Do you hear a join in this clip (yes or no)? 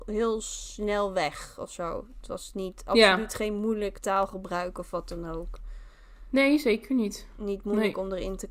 no